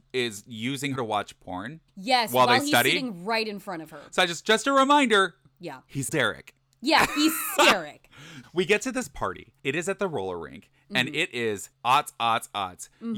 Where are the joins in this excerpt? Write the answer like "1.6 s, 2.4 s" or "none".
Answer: 1.0 s, 1.9 s, 6.1 s, 7.6 s, 8.4 s, 9.6 s, 11.7 s